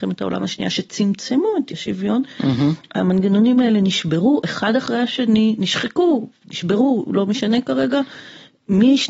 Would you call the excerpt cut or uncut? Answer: cut